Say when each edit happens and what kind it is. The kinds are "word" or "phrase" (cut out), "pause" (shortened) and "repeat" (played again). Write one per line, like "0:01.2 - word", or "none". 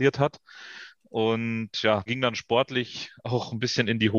0:02.1 - phrase